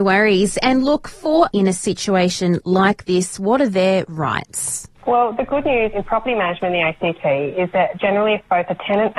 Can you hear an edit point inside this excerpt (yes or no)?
yes